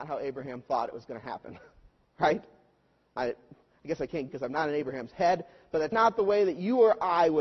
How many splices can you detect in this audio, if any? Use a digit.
2